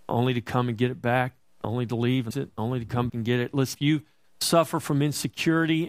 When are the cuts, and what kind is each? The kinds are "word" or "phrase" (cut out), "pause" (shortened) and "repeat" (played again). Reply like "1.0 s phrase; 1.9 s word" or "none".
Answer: 2.3 s word; 3.1 s word; 3.7 s word